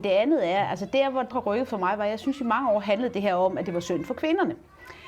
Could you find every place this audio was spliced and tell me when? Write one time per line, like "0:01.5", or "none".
0:01.3

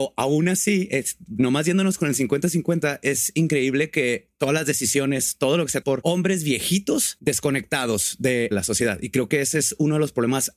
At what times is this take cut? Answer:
0:05.8
0:08.5

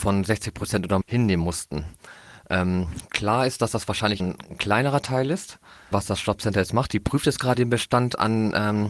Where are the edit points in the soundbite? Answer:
0:01.0
0:04.2
0:05.9
0:07.5

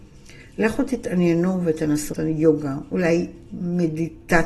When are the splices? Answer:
0:01.6
0:02.1

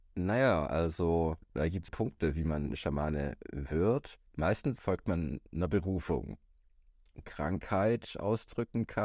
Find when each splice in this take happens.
0:01.9
0:04.3
0:07.2

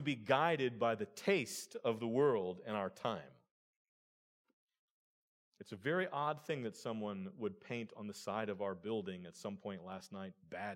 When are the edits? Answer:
none

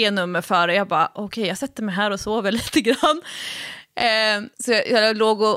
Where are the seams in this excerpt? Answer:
0:04.5

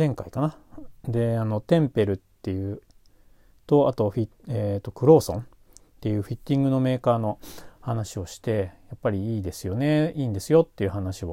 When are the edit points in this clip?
none

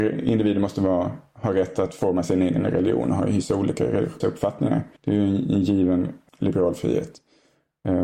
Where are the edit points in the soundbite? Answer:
0:04.2
0:05.0
0:06.3

